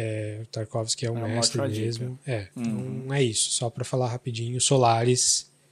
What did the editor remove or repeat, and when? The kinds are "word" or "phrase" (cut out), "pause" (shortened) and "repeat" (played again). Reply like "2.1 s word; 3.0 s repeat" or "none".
2.5 s pause

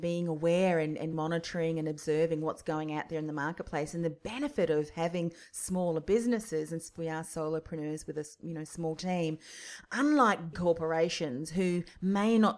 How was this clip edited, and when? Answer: 1.1 s word; 7.0 s phrase; 10.5 s word

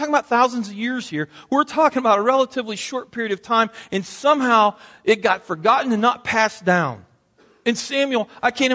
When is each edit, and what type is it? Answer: none

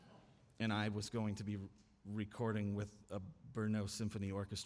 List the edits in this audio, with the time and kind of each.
none

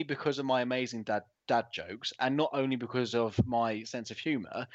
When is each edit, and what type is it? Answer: none

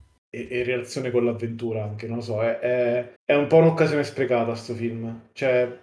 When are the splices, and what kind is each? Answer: 3.2 s pause

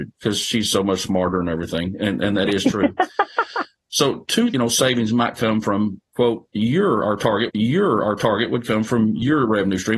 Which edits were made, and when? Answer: 4.5 s phrase; 7.5 s repeat

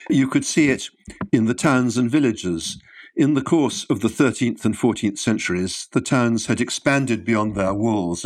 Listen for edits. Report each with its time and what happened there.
none

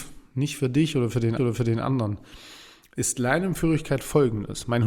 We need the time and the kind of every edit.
1.4 s repeat

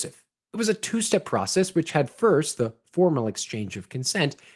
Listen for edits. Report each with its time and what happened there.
none

